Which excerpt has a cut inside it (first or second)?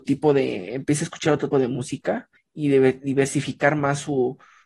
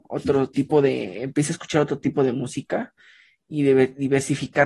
first